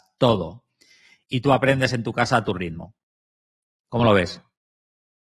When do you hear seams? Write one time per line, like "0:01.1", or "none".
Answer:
none